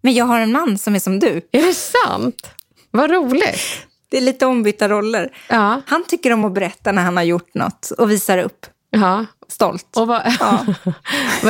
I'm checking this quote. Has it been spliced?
no; 0 cuts

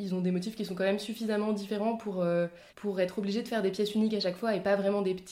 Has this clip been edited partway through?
yes; 1 cut; at 2.7 s

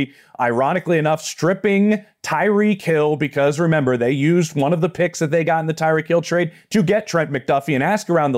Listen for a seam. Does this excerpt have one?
no; 0 cuts

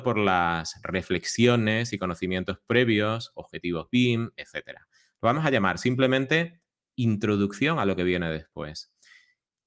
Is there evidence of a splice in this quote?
no; 0 cuts

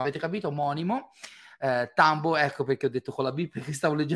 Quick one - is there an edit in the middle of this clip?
no; 0 cuts

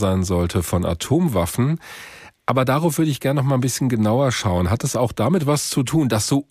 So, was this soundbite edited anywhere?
no; 0 cuts

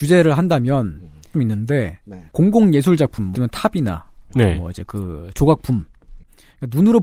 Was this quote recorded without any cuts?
no; 3 cuts; at 1.3 s, 2.3 s, 3.3 s

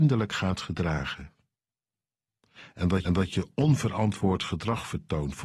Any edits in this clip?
yes; 1 cut; at 3.0 s

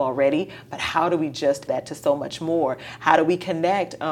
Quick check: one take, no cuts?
no; 1 cut; at 1.7 s

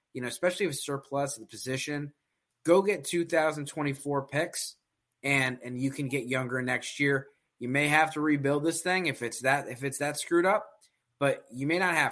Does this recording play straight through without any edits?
yes; 0 cuts

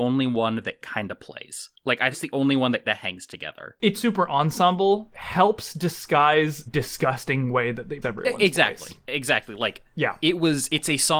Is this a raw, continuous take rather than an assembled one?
no; 6 cuts; at 2.1 s, 2.8 s, 3.9 s, 5.1 s, 6.7 s, 8.0 s

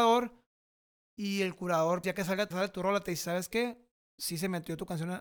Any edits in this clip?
yes; 2 cuts; at 2.0 s, 2.5 s

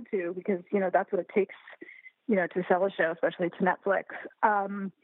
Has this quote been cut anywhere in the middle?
no; 0 cuts

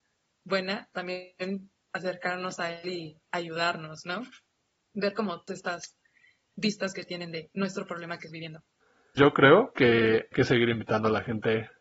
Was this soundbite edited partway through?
yes; 5 cuts; at 0.9 s, 5.5 s, 8.3 s, 9.2 s, 10.3 s

